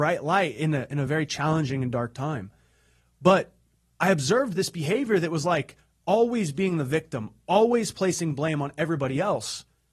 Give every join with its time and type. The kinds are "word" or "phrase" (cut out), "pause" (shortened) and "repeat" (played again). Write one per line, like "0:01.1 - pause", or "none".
none